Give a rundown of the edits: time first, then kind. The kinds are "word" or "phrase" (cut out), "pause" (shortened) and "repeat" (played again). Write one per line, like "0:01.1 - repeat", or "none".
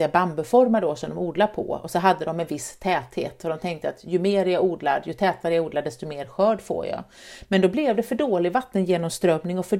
none